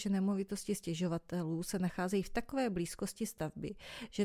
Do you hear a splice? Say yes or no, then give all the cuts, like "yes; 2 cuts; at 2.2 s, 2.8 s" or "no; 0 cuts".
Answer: no; 0 cuts